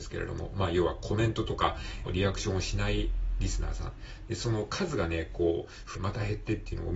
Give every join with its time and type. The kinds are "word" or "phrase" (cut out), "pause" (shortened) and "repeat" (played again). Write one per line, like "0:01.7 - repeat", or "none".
0:02.1 - phrase
0:05.9 - phrase